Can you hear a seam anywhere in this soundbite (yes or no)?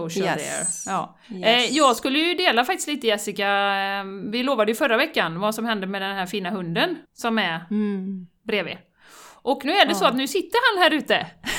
yes